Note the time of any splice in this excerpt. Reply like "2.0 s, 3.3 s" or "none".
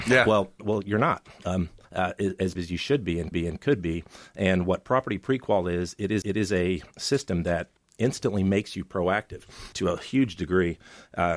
1.8 s, 2.6 s, 3.3 s, 6.2 s, 7.8 s, 9.7 s